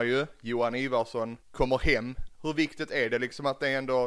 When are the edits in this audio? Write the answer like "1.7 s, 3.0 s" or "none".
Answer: 1.4 s